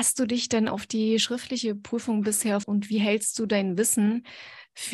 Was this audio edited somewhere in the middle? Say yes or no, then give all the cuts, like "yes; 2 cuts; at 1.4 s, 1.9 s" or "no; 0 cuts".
yes; 1 cut; at 2.6 s